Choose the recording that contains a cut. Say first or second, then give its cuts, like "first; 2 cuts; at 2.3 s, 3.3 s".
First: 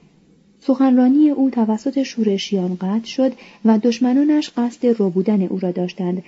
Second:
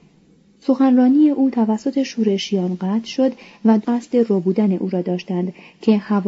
second; 1 cut; at 3.8 s